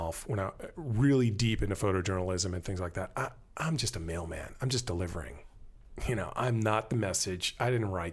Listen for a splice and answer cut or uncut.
uncut